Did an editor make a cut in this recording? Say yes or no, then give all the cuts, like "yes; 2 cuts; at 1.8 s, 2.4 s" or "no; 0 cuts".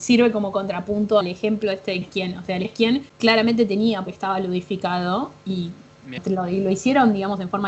yes; 6 cuts; at 1.2 s, 2.0 s, 2.6 s, 3.1 s, 4.1 s, 6.2 s